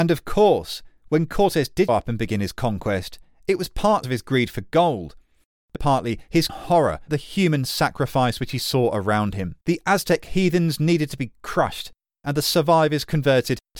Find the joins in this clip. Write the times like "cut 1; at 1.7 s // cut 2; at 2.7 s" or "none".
cut 1; at 1.9 s // cut 2; at 4.0 s // cut 3; at 5.8 s // cut 4; at 6.5 s // cut 5; at 7.1 s // cut 6; at 9.6 s